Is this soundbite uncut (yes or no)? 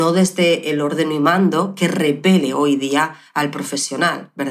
yes